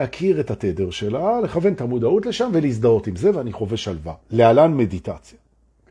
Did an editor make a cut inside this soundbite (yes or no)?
yes